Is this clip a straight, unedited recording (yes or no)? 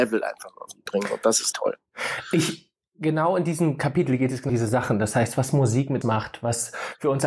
no